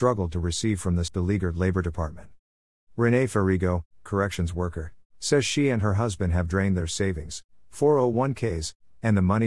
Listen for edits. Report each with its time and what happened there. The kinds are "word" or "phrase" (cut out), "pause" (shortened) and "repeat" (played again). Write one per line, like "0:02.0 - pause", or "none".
0:01.1 - word
0:04.1 - phrase